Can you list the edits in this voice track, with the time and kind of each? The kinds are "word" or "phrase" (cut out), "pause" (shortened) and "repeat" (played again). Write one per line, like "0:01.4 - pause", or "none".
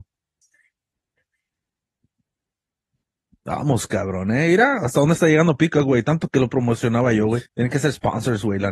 0:07.5 - pause